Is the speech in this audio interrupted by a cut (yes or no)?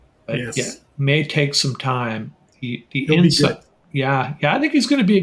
no